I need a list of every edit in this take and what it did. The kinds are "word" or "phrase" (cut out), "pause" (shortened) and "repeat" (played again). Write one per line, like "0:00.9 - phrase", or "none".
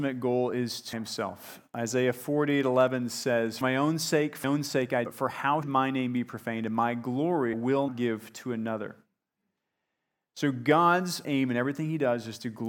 0:00.9 - word
0:03.6 - word
0:04.4 - word
0:05.1 - word
0:05.6 - word
0:07.5 - word
0:07.9 - word
0:11.2 - word